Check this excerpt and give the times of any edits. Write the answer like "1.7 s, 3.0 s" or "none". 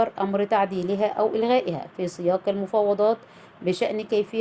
none